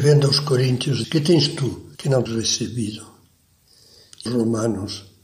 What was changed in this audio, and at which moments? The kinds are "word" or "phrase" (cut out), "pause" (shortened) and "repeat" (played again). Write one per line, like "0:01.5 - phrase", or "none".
0:01.0 - word
0:01.9 - pause
0:02.3 - word
0:04.3 - word